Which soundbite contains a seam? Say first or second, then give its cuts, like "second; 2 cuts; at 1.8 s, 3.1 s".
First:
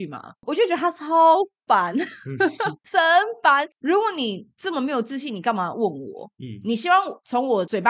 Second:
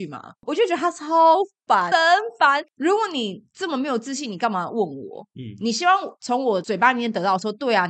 second; 1 cut; at 1.9 s